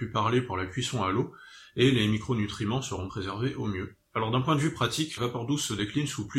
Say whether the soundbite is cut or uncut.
cut